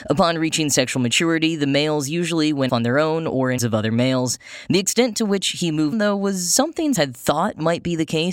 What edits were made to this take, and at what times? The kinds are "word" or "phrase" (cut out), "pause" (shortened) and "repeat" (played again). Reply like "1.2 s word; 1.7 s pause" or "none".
2.7 s word; 3.6 s word; 5.9 s word; 6.9 s word